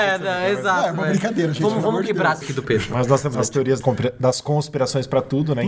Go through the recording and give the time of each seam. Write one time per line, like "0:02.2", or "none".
0:02.4
0:03.3
0:03.8